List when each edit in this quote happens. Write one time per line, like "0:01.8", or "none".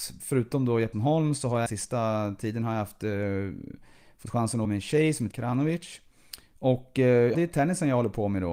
0:00.9
0:01.7
0:04.6
0:05.3
0:07.3